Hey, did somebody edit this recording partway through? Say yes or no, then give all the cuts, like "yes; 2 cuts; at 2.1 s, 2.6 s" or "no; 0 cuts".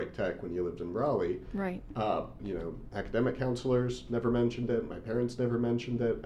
yes; 2 cuts; at 2.4 s, 2.9 s